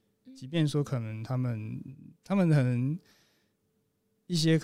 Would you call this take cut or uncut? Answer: cut